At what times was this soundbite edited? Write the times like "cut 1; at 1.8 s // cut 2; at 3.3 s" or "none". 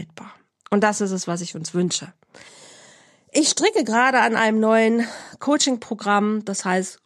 none